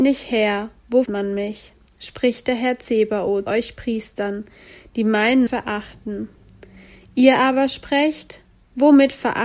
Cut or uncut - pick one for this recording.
cut